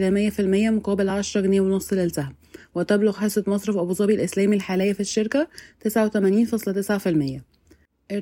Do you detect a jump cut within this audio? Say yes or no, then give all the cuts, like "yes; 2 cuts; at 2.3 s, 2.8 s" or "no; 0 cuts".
no; 0 cuts